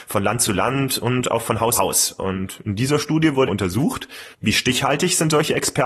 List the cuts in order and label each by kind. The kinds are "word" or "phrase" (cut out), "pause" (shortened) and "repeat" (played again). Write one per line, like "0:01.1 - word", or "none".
0:01.7 - word
0:03.5 - word
0:04.3 - pause

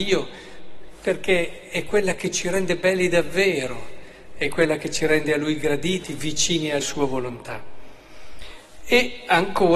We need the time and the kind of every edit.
0:06.8 - phrase

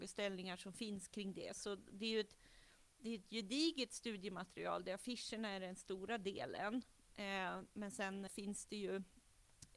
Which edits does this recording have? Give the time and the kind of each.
0:08.3 - word

